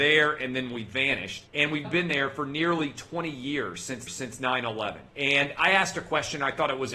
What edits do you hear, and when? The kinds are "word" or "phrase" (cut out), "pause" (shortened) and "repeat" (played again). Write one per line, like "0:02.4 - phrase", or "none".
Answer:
0:01.5 - pause
0:01.8 - word
0:04.1 - repeat
0:05.1 - pause